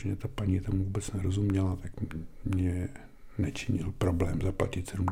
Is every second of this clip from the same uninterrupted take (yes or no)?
yes